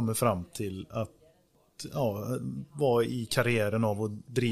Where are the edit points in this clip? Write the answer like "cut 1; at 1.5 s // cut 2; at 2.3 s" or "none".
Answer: none